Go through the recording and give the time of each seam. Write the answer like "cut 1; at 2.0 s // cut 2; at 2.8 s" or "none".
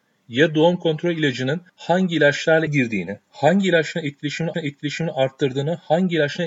cut 1; at 1.7 s // cut 2; at 2.7 s // cut 3; at 4.5 s